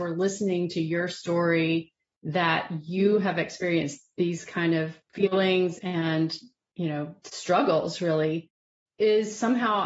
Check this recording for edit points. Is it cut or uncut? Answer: uncut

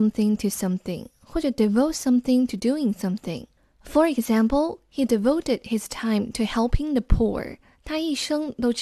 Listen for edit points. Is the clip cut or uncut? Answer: uncut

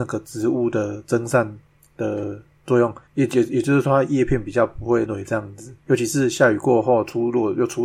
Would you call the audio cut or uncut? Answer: cut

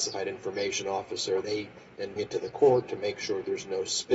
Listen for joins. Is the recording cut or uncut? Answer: cut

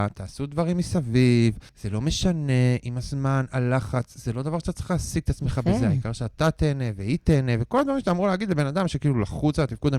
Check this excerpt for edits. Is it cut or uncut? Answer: cut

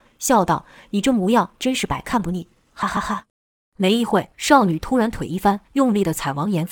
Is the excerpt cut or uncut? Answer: cut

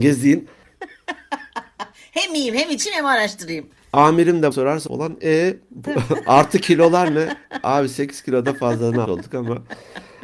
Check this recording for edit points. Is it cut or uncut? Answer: cut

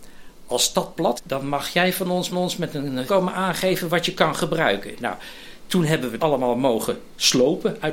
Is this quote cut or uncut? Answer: cut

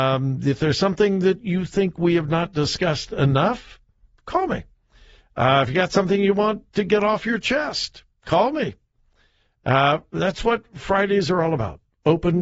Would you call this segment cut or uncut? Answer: cut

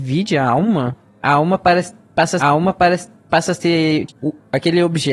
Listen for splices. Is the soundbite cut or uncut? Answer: cut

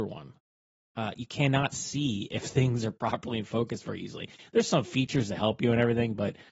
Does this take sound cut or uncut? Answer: uncut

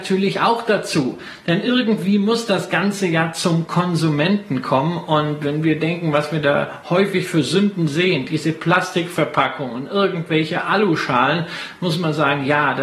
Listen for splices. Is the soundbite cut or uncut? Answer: uncut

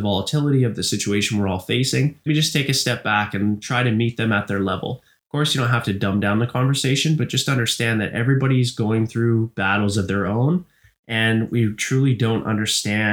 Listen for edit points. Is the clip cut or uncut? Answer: cut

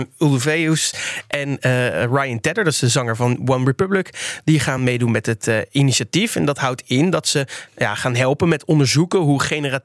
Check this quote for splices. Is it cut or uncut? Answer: uncut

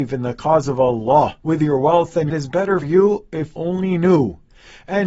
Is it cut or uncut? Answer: cut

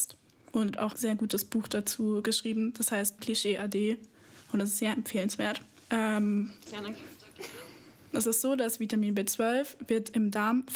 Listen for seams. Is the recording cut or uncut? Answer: cut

